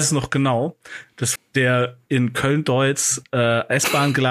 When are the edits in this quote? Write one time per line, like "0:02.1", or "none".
0:01.4
0:02.1